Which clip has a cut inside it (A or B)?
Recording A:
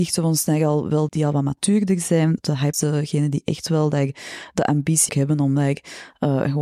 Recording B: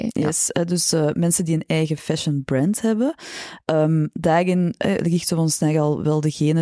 A